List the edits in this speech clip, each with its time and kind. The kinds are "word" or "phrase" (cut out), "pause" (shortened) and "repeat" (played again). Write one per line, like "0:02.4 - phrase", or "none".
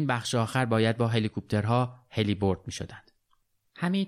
none